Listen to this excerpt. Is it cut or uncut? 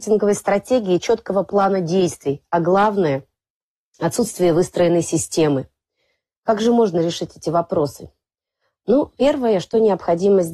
uncut